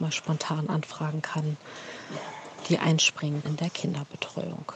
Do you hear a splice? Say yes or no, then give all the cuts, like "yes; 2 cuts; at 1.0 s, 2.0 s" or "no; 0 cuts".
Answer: yes; 1 cut; at 3.4 s